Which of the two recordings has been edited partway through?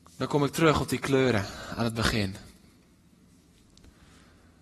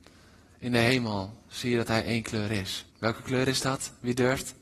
second; 1 cut; at 2.9 s

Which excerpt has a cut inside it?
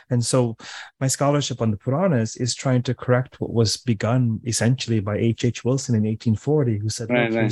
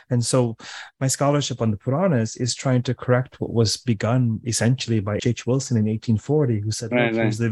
second; 1 cut; at 5.2 s

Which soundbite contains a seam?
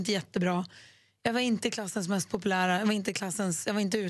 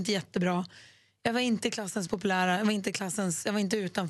second; 1 cut; at 2.1 s

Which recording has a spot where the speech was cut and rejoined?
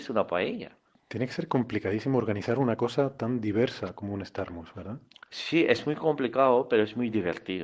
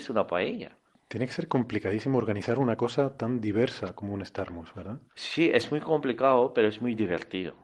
second; 1 cut; at 5.1 s

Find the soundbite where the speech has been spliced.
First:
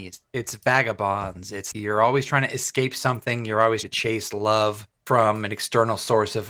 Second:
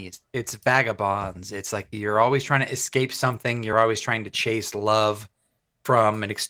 first; 3 cuts; at 1.7 s, 3.8 s, 5.0 s

